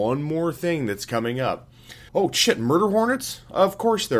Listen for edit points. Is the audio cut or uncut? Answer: cut